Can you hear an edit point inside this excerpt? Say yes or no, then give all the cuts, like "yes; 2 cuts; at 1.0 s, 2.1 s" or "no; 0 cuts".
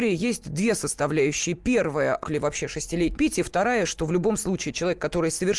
yes; 2 cuts; at 2.2 s, 3.2 s